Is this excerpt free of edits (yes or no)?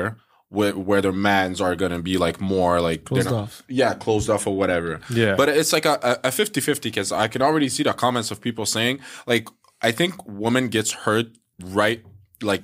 yes